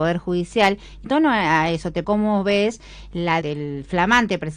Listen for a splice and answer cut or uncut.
cut